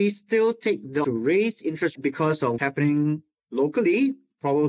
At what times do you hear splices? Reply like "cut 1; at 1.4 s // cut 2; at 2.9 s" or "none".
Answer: cut 1; at 1.0 s // cut 2; at 2.0 s // cut 3; at 2.6 s